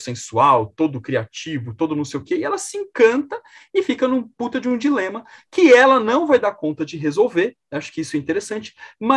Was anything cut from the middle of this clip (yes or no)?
no